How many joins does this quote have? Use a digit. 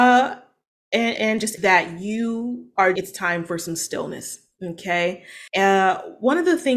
4